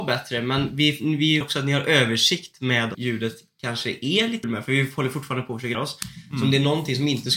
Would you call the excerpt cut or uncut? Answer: cut